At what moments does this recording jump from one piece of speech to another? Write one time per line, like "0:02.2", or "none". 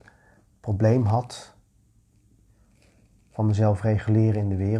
none